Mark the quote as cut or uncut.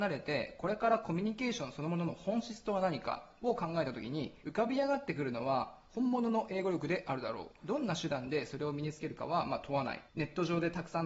cut